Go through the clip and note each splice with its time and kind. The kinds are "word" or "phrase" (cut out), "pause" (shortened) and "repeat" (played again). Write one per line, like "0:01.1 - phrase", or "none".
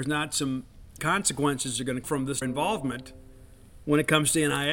0:01.0 - word
0:02.0 - word
0:02.4 - word
0:03.8 - pause